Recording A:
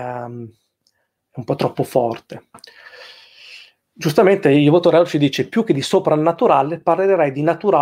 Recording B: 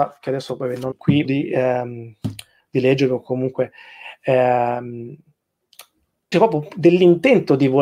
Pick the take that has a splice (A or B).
B